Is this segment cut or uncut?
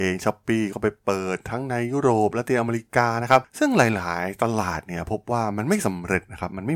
uncut